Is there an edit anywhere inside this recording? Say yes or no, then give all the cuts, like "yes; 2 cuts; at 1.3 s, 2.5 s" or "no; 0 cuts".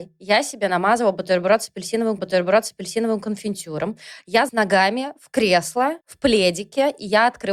yes; 3 cuts; at 2.2 s, 4.5 s, 6.0 s